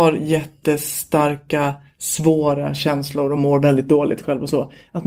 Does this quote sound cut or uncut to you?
uncut